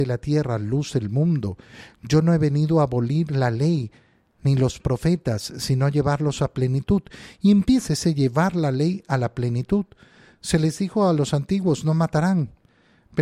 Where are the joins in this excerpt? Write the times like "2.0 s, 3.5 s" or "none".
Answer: 7.9 s